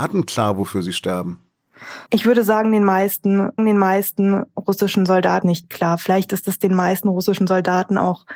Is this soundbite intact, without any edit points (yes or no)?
no